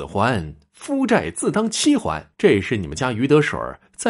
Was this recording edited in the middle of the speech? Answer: yes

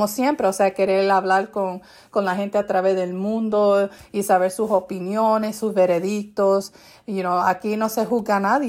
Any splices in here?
no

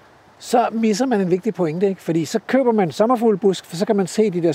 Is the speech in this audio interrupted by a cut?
no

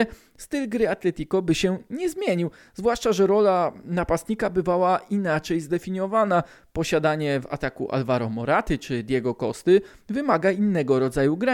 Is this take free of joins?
yes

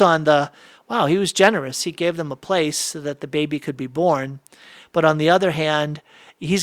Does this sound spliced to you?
no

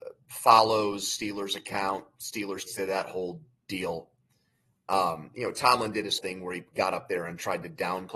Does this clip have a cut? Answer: yes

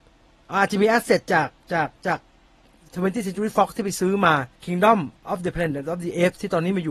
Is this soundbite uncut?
no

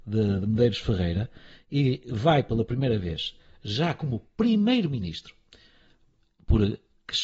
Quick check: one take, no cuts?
yes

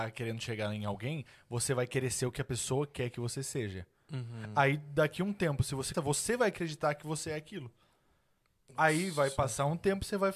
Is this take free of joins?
no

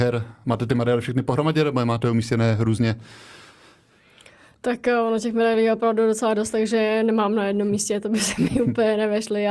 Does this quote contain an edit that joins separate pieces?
no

